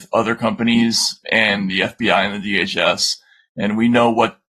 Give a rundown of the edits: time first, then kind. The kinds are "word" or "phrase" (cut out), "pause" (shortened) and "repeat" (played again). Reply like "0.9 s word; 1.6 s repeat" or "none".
1.2 s word